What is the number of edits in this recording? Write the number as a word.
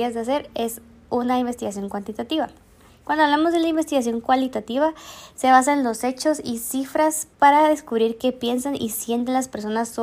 one